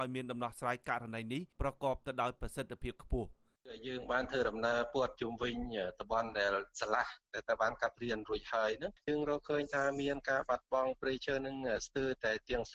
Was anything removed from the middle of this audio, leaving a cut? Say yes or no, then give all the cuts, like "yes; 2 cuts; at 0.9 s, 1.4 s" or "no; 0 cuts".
yes; 1 cut; at 1.5 s